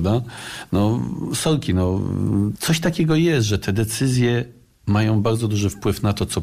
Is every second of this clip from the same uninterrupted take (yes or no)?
yes